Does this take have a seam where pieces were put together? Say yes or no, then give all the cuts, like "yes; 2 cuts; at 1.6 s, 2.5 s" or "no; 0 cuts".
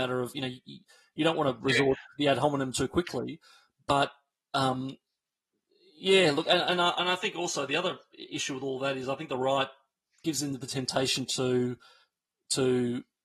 no; 0 cuts